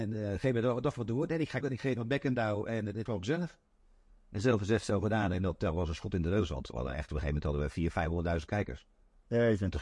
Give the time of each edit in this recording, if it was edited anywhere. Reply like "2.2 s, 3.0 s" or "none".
1.6 s, 3.1 s